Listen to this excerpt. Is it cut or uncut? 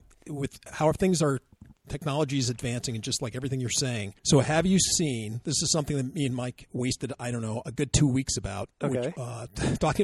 cut